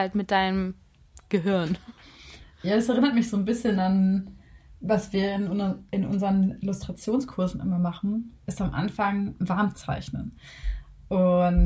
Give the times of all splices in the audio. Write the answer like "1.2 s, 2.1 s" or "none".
none